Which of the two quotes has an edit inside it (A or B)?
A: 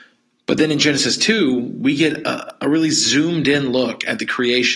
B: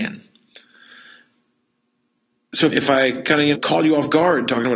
B